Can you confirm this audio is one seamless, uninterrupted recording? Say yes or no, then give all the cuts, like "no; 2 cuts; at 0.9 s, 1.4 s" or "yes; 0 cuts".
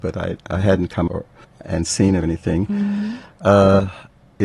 no; 3 cuts; at 1.1 s, 1.4 s, 2.2 s